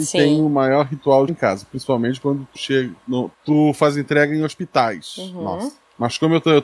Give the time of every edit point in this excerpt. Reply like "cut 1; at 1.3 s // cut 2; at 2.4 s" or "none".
cut 1; at 1.3 s // cut 2; at 2.5 s // cut 3; at 3.3 s